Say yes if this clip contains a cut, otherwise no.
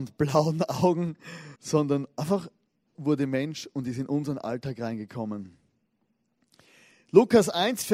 yes